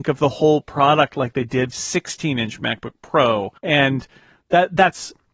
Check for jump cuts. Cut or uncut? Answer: cut